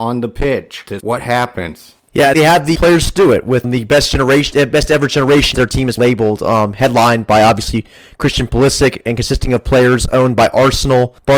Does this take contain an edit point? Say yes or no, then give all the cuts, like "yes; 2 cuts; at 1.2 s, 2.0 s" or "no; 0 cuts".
yes; 5 cuts; at 1.0 s, 2.8 s, 3.6 s, 5.5 s, 6.0 s